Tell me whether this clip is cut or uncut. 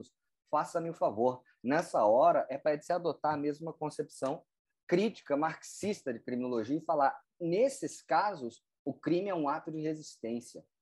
uncut